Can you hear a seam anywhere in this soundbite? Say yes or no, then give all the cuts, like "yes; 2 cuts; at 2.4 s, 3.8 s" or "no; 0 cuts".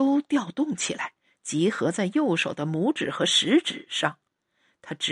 no; 0 cuts